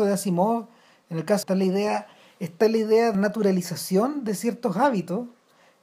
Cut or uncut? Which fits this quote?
cut